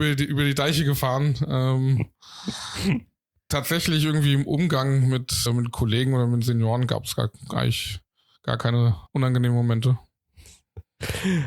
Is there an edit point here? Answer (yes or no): yes